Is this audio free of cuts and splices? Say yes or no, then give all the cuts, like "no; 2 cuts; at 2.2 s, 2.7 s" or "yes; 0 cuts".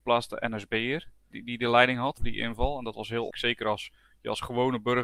no; 3 cuts; at 1.3 s, 2.2 s, 3.3 s